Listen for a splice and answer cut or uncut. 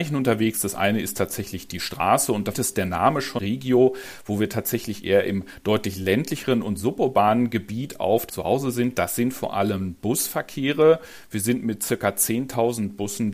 cut